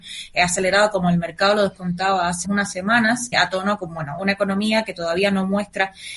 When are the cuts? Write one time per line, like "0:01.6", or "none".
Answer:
0:02.4
0:03.3
0:04.2